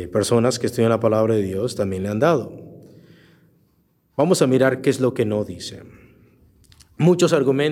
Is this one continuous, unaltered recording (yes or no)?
yes